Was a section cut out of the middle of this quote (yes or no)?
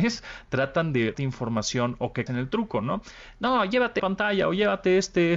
yes